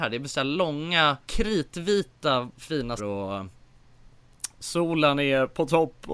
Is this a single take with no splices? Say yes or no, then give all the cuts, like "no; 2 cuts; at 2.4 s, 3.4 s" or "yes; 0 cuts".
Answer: no; 2 cuts; at 1.2 s, 3.0 s